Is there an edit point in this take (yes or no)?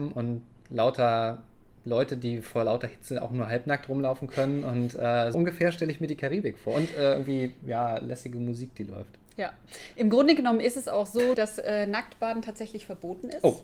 yes